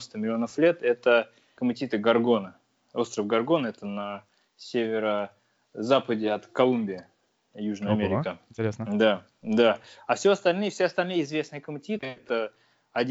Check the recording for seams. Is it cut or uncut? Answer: uncut